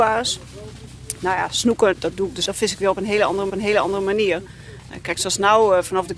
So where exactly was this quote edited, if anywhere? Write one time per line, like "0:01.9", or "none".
0:01.9
0:02.5
0:03.5